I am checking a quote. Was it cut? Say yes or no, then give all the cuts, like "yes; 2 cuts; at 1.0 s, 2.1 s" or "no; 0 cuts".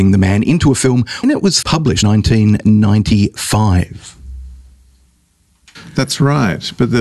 yes; 3 cuts; at 1.2 s, 1.6 s, 2.0 s